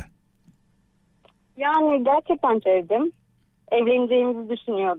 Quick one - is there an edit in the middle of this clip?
yes; 1 cut; at 2.6 s

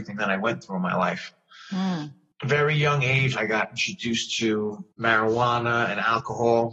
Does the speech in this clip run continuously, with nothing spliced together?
no; 2 cuts; at 2.3 s, 4.9 s

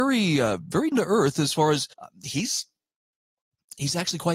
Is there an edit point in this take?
yes; 2 cuts; at 0.9 s, 1.9 s

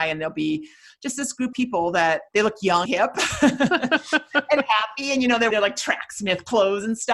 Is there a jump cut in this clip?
yes; 4 cuts; at 1.5 s, 2.3 s, 2.9 s, 5.5 s

